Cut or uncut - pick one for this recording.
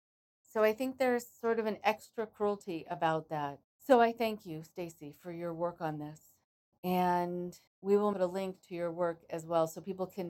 cut